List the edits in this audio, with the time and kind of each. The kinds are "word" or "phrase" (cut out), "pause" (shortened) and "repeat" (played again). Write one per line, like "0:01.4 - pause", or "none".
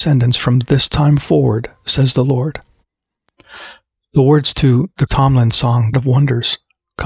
0:05.1 - word
0:05.9 - word